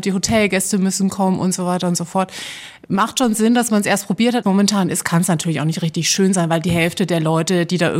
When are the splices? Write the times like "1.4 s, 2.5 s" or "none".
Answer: 4.4 s